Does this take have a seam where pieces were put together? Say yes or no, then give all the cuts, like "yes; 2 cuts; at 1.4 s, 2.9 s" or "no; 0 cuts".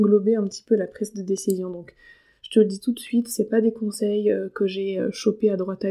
no; 0 cuts